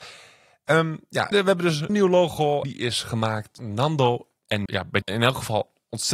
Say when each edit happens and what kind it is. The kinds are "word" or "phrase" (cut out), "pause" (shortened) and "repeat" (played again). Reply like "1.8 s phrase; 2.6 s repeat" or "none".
1.3 s word; 1.9 s word; 2.6 s word; 3.6 s word; 4.7 s word; 5.0 s word